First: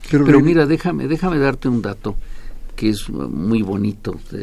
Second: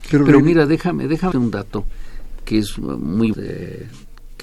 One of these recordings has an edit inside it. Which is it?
second; 2 cuts; at 1.3 s, 3.3 s

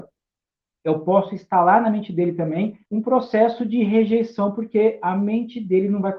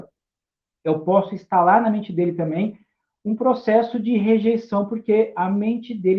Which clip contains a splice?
first; 1 cut; at 2.9 s

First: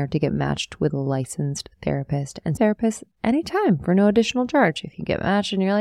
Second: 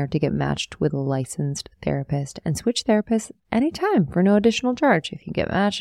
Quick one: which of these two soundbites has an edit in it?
first; 1 cut; at 2.6 s

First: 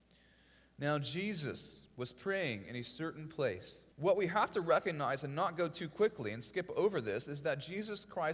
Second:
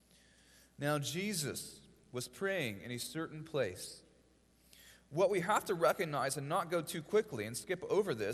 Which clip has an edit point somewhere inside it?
first; 2 cuts; at 1.9 s, 3.9 s

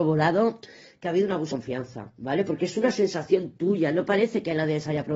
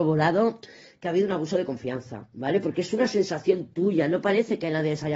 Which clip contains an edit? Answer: first; 1 cut; at 1.5 s

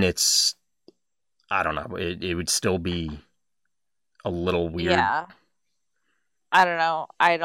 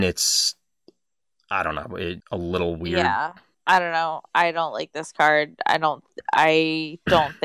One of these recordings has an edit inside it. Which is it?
second; 2 cuts; at 2.2 s, 3.5 s

